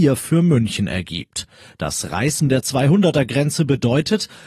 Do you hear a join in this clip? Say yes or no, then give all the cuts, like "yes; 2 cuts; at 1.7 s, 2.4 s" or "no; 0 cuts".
no; 0 cuts